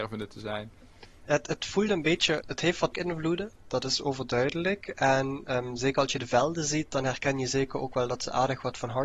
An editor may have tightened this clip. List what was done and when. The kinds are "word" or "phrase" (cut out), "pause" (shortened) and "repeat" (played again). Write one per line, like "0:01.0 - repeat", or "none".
0:02.4 - word
0:02.9 - word